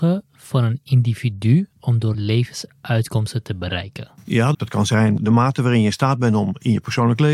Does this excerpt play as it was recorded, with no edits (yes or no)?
no